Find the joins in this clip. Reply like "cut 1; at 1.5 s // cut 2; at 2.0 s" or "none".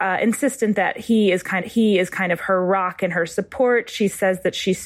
cut 1; at 1.6 s